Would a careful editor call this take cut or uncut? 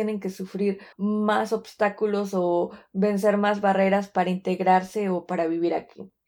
cut